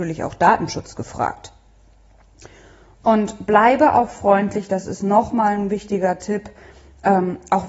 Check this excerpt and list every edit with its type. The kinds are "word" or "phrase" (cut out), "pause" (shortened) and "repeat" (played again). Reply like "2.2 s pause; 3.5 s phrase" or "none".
none